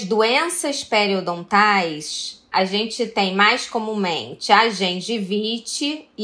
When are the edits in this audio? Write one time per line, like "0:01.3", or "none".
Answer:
0:02.5